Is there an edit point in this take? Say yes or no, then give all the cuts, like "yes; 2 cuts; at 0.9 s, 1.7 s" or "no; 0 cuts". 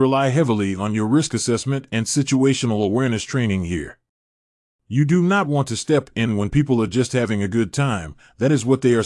no; 0 cuts